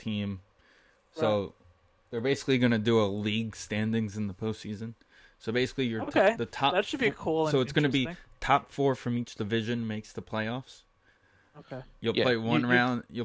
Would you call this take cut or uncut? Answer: uncut